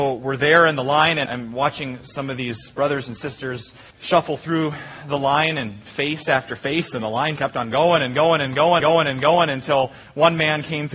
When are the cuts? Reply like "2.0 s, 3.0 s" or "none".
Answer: 1.3 s, 3.9 s, 7.4 s, 8.8 s

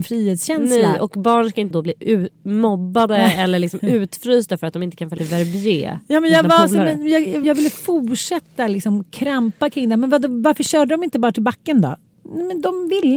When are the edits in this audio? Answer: 1.7 s, 5.2 s, 7.4 s

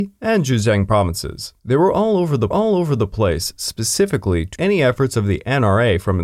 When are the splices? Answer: 1.6 s, 2.5 s, 4.6 s

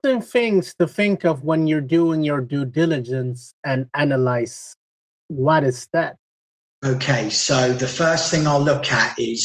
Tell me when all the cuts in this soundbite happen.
none

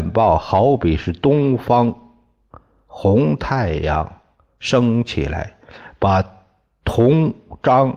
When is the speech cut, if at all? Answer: none

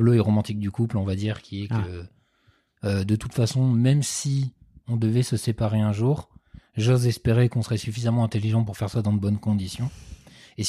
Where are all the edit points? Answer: none

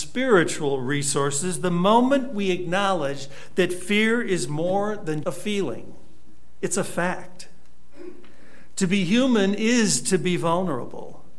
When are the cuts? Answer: 5.2 s

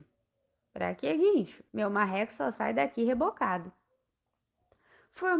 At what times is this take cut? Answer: 1.7 s

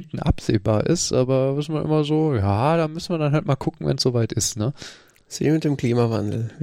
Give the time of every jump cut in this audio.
none

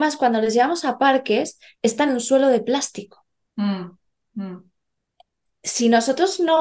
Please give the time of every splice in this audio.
2.1 s

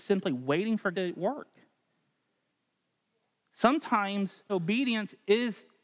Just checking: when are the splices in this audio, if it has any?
0.9 s, 4.5 s

